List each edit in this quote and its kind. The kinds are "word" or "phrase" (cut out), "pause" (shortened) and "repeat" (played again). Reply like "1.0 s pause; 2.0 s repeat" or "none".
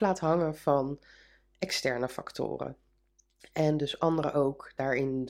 none